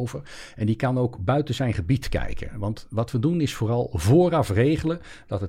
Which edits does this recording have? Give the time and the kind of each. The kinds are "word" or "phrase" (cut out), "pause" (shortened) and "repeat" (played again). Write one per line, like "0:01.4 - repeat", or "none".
none

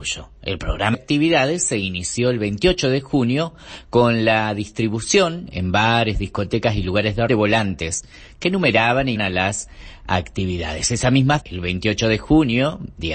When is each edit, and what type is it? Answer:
0:00.9 - word
0:07.3 - word
0:09.2 - word
0:11.4 - word

